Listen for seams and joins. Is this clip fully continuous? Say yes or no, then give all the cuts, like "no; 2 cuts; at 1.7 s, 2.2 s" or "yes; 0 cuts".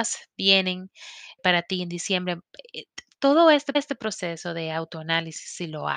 no; 2 cuts; at 1.4 s, 3.7 s